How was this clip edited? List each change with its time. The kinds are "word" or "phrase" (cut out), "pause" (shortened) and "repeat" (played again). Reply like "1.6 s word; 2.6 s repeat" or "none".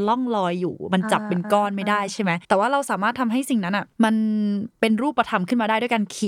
2.4 s pause; 3.9 s pause; 4.8 s pause